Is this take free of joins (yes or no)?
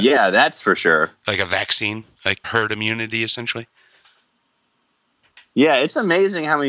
no